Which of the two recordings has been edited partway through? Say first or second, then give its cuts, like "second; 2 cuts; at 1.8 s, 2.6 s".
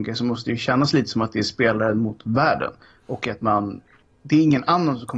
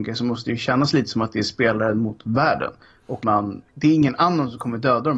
second; 2 cuts; at 3.2 s, 3.7 s